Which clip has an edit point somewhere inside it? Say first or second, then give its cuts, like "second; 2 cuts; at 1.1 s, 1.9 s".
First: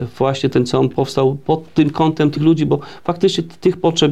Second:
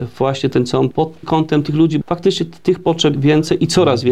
second; 4 cuts; at 0.9 s, 1.2 s, 2.0 s, 3.1 s